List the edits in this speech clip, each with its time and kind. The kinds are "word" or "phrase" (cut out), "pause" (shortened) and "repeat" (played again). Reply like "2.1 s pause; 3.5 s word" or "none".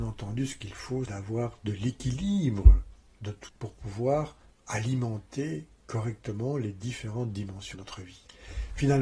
1.1 s word; 3.5 s word; 7.7 s word